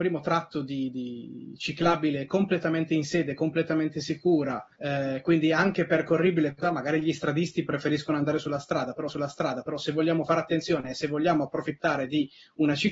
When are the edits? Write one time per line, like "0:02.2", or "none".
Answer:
0:04.7
0:06.6
0:09.1